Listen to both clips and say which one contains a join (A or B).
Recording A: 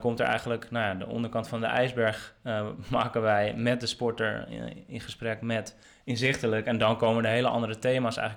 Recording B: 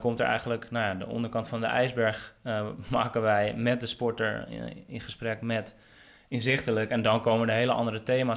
A